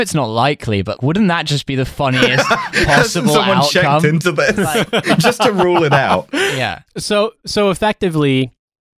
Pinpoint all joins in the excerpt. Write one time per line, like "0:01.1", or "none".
0:01.0
0:06.9